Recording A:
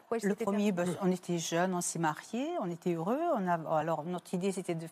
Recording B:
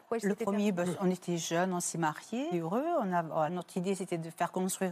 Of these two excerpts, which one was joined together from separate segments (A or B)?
B